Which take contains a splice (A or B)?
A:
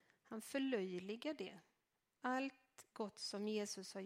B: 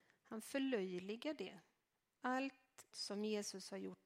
B